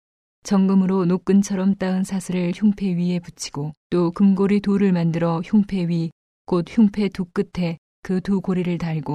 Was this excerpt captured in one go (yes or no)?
no